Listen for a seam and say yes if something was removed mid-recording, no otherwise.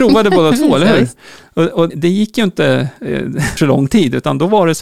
yes